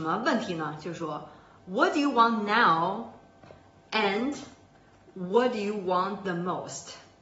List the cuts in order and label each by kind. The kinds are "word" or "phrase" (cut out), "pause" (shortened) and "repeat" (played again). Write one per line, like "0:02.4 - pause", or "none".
none